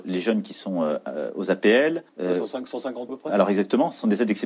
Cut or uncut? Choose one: cut